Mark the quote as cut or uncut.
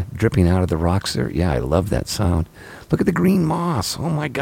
uncut